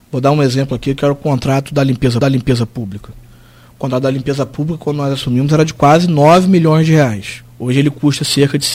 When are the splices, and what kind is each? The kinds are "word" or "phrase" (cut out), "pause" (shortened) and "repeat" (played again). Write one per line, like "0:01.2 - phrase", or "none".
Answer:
0:02.2 - repeat
0:07.5 - pause